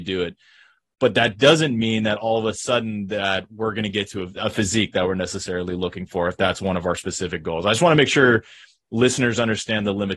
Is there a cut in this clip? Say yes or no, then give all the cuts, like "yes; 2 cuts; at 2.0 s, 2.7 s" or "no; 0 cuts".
yes; 1 cut; at 4.4 s